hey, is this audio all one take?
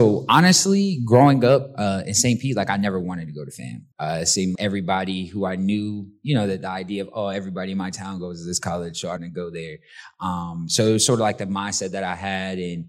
no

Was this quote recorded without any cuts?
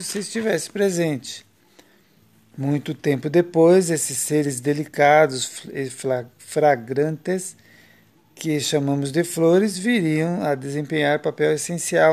yes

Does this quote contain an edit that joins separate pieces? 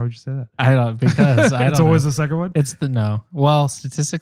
no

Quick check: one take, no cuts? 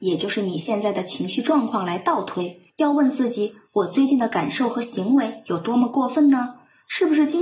no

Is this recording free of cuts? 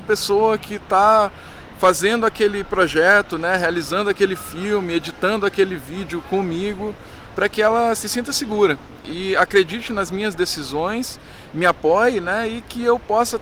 yes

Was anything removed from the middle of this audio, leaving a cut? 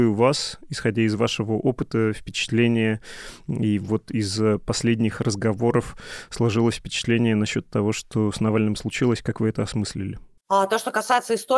no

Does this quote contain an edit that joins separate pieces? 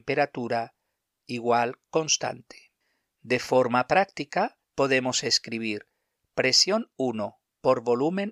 yes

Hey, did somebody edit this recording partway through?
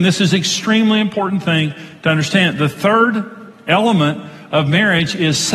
no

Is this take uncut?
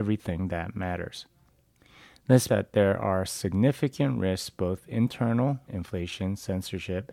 no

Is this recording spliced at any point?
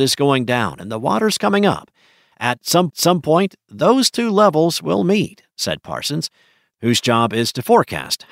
yes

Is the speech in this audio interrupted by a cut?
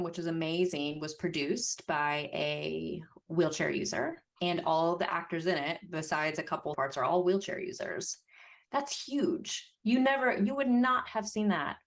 yes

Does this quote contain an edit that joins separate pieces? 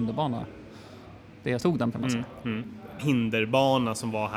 yes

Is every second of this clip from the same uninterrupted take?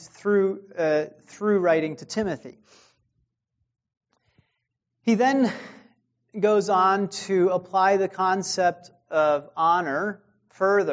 yes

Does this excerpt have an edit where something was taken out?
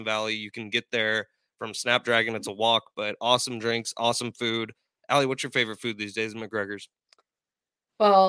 no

